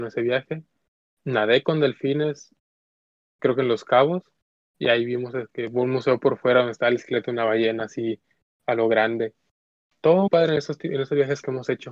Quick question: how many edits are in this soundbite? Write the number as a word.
two